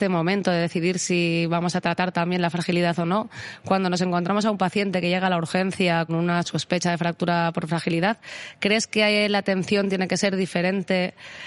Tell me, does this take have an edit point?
yes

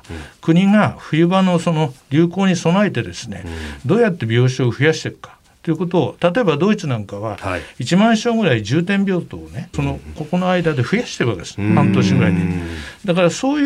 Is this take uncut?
no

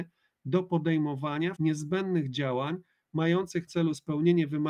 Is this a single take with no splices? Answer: no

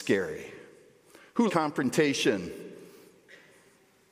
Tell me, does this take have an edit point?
yes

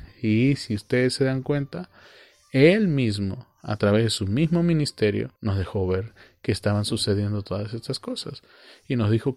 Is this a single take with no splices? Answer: no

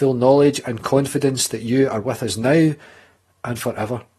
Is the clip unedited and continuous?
yes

